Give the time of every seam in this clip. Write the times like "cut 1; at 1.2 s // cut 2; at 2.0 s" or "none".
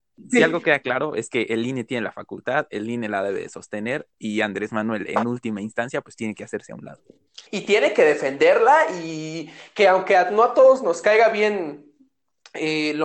cut 1; at 7.5 s